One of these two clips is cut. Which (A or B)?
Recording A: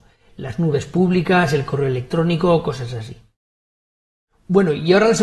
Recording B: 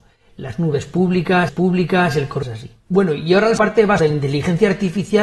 B